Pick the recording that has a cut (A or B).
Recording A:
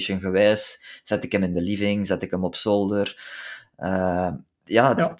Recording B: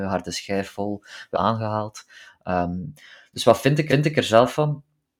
B